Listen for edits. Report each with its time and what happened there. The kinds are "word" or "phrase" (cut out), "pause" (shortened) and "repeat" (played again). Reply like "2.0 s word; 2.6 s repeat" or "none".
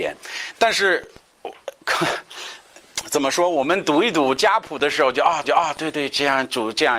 5.4 s repeat